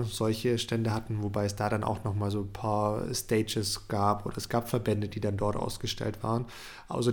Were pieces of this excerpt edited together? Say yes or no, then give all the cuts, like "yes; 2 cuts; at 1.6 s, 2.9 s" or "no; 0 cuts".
no; 0 cuts